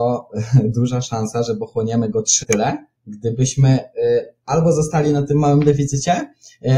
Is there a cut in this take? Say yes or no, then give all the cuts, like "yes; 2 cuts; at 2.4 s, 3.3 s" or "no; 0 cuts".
yes; 2 cuts; at 2.4 s, 3.0 s